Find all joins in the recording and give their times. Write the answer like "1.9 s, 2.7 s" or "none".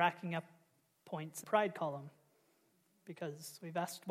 1.4 s

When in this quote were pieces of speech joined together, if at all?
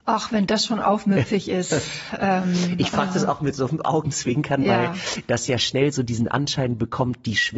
none

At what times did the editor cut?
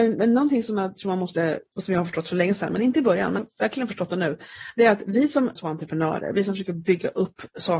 1.7 s, 3.4 s, 5.6 s

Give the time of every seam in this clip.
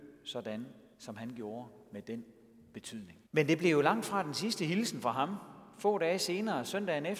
0.9 s, 3.3 s

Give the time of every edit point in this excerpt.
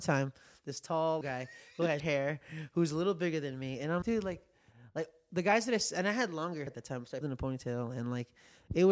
1.2 s, 2.0 s, 4.0 s, 6.7 s, 7.2 s

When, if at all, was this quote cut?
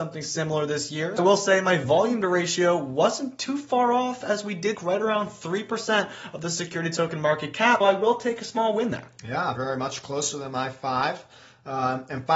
1.2 s, 4.7 s, 7.8 s, 9.6 s

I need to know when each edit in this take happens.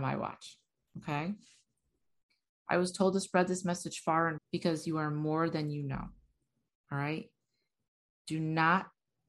4.4 s

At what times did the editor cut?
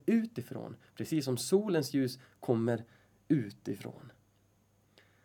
none

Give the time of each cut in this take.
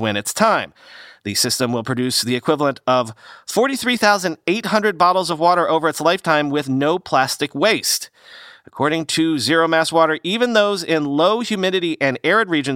none

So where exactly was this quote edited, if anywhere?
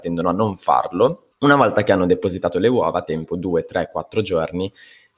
1.3 s

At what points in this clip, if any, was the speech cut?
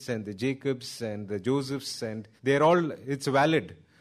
2.4 s

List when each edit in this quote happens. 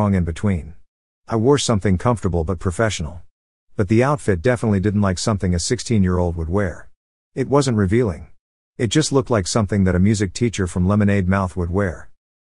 none

